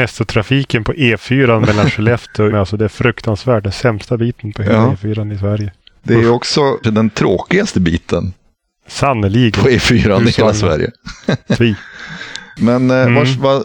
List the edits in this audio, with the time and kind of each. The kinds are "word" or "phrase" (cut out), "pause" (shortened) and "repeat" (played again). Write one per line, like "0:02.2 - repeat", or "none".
0:02.5 - word
0:06.8 - word